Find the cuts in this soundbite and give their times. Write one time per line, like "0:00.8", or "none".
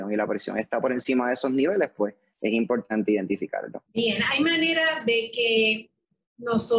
0:03.9